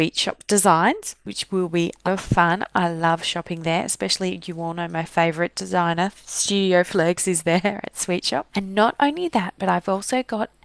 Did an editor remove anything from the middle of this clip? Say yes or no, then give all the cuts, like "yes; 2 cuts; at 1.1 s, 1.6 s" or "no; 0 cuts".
yes; 1 cut; at 2.0 s